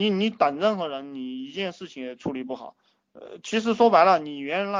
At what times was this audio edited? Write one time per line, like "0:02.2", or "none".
none